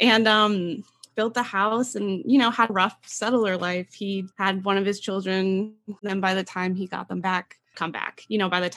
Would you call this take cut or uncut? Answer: cut